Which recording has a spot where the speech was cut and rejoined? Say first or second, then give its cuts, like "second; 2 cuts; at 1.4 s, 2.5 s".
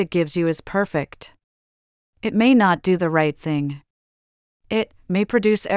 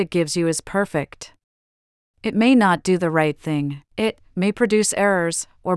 second; 1 cut; at 3.9 s